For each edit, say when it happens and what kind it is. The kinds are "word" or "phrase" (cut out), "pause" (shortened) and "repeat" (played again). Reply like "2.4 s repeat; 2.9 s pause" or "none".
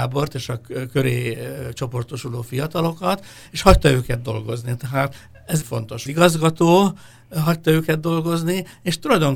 5.6 s word; 6.1 s phrase